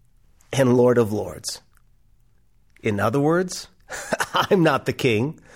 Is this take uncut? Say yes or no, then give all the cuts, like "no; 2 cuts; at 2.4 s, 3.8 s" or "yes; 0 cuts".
yes; 0 cuts